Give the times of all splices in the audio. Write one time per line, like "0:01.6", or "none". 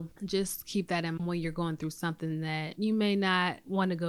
0:01.2